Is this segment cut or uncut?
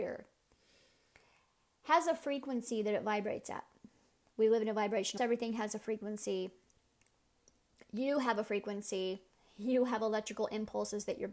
cut